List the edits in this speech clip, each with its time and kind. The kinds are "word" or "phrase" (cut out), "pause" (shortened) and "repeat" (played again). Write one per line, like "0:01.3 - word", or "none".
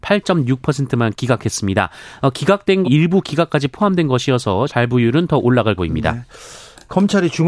0:02.8 - word
0:04.7 - word
0:05.8 - word